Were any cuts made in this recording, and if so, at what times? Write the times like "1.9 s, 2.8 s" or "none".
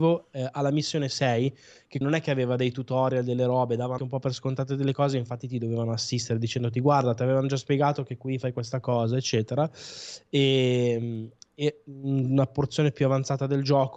2.0 s, 4.0 s